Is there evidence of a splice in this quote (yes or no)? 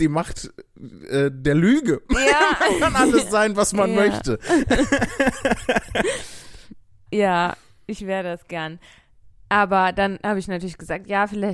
yes